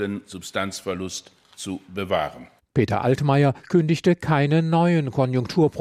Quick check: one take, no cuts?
yes; 0 cuts

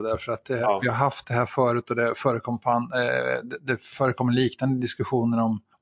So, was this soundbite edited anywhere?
no; 0 cuts

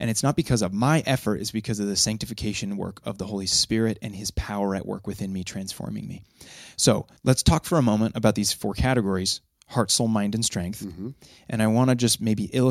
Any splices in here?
yes; 1 cut; at 7.2 s

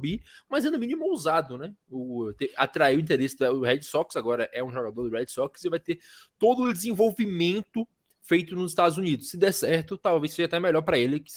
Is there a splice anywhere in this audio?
no; 0 cuts

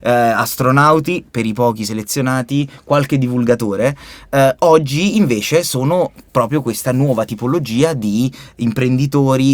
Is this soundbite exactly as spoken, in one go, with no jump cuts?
yes; 0 cuts

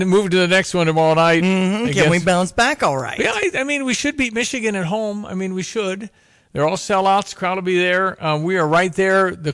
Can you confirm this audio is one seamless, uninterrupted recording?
yes; 0 cuts

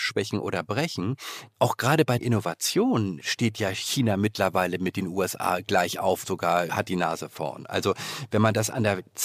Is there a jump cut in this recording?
yes; 4 cuts; at 2.2 s, 3.2 s, 6.2 s, 6.7 s

